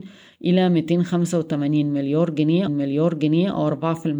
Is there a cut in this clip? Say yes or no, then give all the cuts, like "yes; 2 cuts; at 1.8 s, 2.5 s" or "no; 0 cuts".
yes; 1 cut; at 2.7 s